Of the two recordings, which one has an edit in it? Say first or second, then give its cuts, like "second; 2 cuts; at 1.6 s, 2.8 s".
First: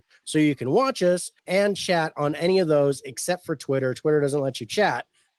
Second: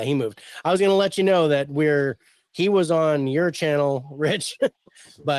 first; 1 cut; at 1.4 s